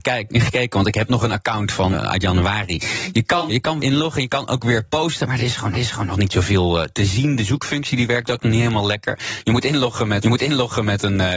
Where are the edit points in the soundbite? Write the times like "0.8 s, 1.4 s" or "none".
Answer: 1.9 s, 3.5 s, 3.8 s, 5.7 s, 10.2 s